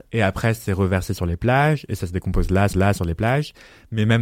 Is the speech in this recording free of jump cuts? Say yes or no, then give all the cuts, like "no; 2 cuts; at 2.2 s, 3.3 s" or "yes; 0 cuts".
no; 1 cut; at 2.7 s